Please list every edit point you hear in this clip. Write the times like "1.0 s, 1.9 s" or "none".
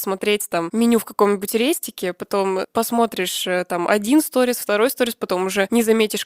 none